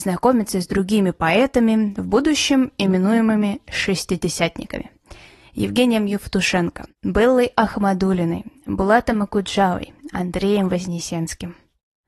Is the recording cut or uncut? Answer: uncut